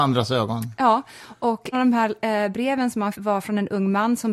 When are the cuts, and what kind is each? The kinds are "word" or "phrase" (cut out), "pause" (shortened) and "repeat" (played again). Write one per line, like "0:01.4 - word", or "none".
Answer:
0:01.7 - word
0:03.1 - word